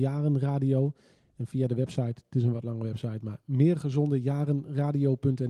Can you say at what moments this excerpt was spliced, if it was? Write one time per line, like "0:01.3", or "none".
none